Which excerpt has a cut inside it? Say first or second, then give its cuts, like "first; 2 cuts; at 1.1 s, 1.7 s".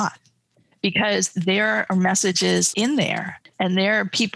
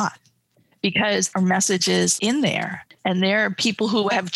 second; 1 cut; at 1.3 s